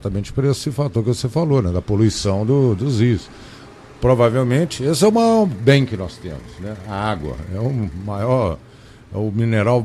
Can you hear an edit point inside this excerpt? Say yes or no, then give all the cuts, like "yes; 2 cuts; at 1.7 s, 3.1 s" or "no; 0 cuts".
no; 0 cuts